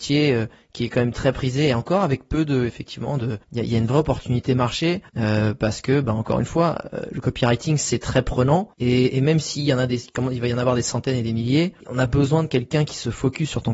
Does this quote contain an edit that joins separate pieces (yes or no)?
yes